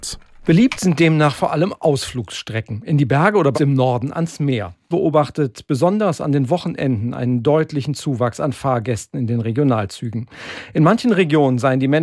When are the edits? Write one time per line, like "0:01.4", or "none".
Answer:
0:03.5
0:04.9